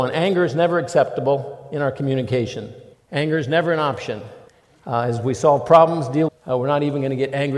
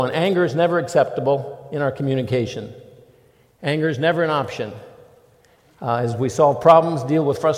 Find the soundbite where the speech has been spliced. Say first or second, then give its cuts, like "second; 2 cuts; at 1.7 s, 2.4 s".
first; 3 cuts; at 2.9 s, 4.5 s, 6.3 s